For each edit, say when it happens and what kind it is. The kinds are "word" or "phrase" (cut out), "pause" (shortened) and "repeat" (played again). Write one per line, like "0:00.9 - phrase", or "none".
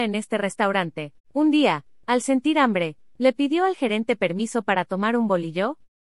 0:01.2 - pause